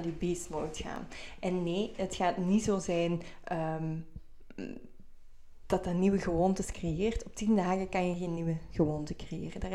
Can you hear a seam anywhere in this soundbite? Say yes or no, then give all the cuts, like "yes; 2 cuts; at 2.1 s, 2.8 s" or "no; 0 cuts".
no; 0 cuts